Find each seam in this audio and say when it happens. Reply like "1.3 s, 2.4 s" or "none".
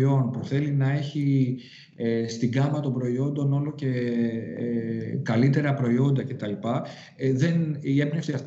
none